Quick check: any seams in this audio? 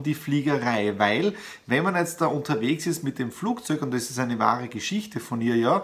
no; 0 cuts

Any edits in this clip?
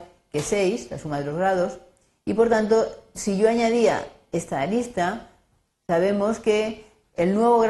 no; 0 cuts

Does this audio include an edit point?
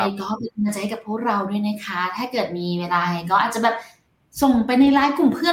no; 0 cuts

